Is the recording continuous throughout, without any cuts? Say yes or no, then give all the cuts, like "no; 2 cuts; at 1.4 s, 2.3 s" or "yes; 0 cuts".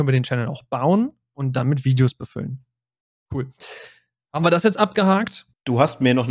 yes; 0 cuts